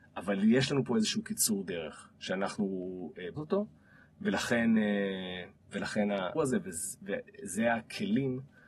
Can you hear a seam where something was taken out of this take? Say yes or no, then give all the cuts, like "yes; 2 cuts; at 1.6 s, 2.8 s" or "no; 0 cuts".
yes; 2 cuts; at 3.4 s, 6.3 s